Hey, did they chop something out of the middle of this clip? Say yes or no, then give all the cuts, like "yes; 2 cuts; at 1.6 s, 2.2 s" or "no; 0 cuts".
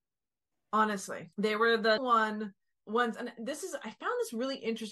yes; 3 cuts; at 1.3 s, 2.0 s, 2.8 s